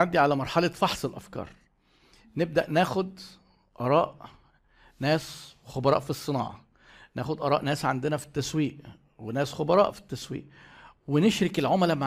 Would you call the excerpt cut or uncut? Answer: uncut